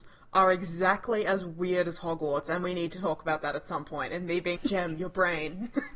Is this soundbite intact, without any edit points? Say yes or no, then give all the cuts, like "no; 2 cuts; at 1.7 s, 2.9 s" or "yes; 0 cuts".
no; 1 cut; at 4.6 s